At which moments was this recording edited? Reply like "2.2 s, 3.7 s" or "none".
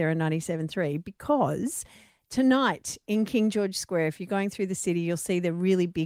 none